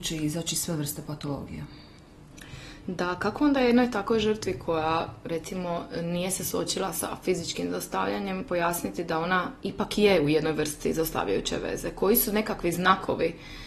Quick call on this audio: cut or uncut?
uncut